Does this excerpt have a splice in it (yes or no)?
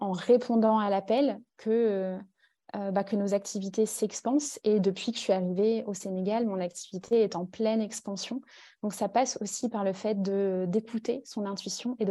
no